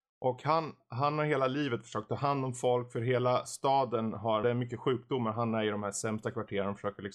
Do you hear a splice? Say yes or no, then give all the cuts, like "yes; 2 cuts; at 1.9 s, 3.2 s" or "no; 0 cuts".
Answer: yes; 1 cut; at 4.4 s